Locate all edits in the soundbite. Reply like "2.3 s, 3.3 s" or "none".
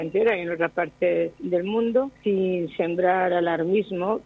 2.2 s